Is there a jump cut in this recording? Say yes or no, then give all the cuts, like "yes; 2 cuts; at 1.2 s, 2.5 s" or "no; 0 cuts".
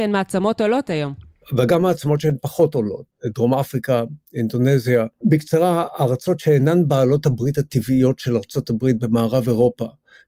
no; 0 cuts